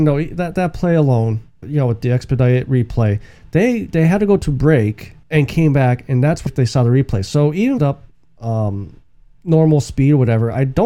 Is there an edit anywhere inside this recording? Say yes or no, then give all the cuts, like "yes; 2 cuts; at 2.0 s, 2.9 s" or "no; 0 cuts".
yes; 4 cuts; at 1.6 s, 5.2 s, 6.5 s, 7.8 s